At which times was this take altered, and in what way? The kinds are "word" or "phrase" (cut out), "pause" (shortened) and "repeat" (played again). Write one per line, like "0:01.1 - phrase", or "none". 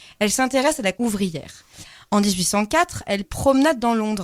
0:00.9 - word
0:03.2 - word